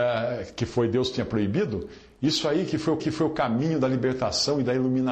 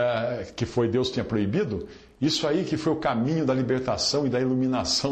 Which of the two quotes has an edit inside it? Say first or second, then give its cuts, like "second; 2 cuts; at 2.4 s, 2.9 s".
first; 1 cut; at 3.0 s